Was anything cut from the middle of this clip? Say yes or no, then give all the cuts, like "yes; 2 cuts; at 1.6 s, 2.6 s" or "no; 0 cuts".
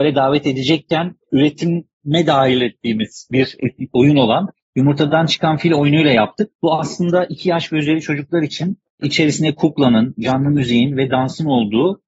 yes; 2 cuts; at 1.2 s, 6.5 s